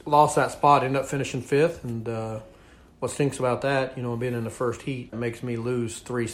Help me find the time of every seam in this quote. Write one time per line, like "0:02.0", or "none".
0:05.1